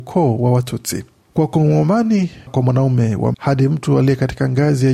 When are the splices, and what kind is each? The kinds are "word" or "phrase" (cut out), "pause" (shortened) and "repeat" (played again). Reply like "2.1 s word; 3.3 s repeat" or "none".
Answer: 2.5 s word; 3.3 s word